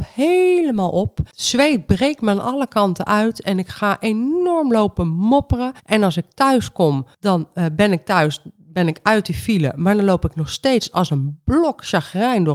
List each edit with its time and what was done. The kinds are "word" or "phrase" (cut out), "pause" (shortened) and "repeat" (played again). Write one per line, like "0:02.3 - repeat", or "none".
0:01.3 - pause
0:05.8 - pause
0:07.1 - pause

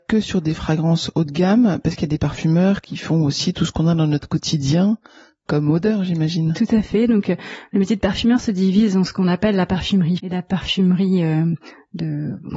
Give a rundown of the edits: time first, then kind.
0:10.2 - word

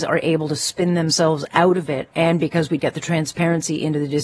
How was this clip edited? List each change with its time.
0:02.8 - word

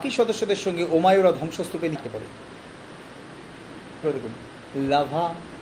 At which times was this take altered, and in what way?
0:01.9 - word
0:04.0 - word

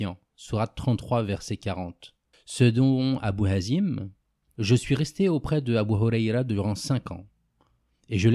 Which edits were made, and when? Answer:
0:02.3 - pause

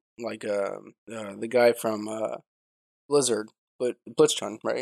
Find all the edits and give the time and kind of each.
0:01.0 - pause

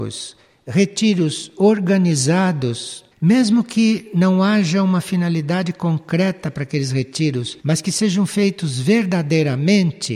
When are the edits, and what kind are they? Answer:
0:03.1 - pause
0:07.6 - pause

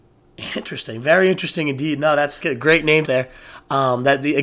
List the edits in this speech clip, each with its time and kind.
0:02.4 - word
0:03.0 - phrase

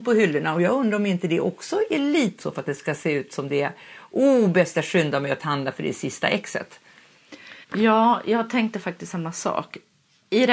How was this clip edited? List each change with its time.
0:02.4 - word
0:07.6 - pause

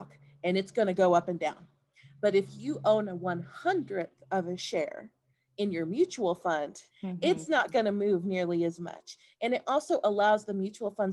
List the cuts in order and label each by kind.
0:06.9 - pause

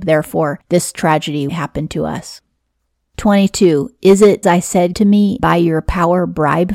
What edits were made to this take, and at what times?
0:01.5 - word
0:04.4 - word
0:04.9 - word
0:05.4 - word

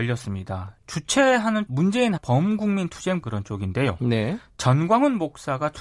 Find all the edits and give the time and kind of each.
0:01.7 - word
0:02.2 - word
0:03.2 - word

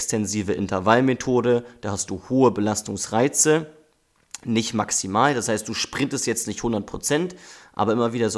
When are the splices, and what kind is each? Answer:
none

